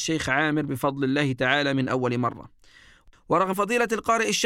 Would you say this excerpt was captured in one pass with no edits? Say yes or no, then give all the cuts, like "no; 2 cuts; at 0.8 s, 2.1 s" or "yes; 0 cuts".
no; 1 cut; at 3.5 s